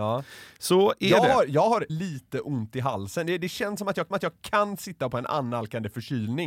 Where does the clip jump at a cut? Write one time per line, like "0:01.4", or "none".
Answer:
0:01.9
0:04.1